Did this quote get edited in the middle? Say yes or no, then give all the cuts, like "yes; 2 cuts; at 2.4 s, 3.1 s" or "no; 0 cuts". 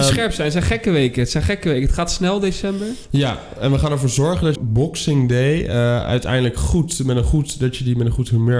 yes; 1 cut; at 4.6 s